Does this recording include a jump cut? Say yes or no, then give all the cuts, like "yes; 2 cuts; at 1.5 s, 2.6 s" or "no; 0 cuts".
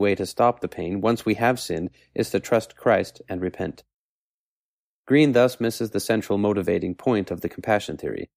no; 0 cuts